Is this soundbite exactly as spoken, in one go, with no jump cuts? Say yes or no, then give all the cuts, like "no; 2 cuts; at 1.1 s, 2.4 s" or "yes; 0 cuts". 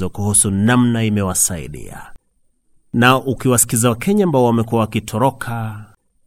yes; 0 cuts